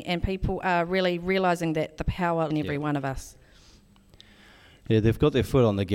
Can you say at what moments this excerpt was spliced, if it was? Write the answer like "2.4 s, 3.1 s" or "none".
2.5 s

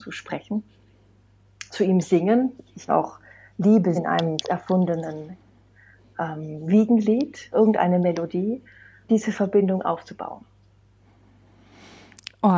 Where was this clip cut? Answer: 1.7 s, 2.9 s, 3.9 s, 4.4 s, 7.5 s, 9.1 s

